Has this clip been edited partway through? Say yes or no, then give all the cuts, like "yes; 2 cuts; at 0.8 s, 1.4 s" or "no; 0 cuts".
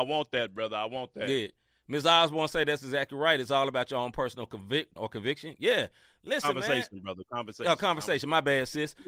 yes; 1 cut; at 5.0 s